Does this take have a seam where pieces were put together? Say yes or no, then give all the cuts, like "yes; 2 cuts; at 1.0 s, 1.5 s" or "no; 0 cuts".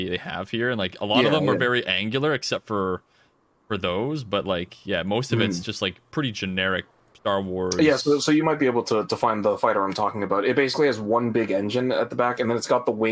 no; 0 cuts